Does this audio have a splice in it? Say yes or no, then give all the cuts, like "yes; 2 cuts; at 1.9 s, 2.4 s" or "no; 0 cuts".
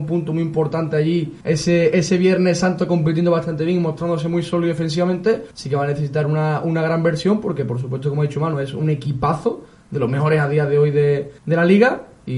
yes; 3 cuts; at 1.4 s, 5.5 s, 11.4 s